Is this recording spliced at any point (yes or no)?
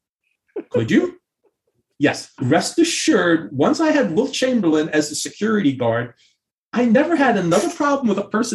no